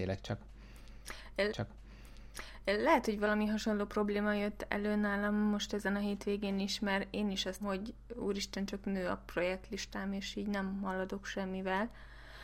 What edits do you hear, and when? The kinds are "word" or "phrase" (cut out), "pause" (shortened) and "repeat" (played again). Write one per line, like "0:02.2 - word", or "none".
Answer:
0:01.5 - repeat
0:07.6 - word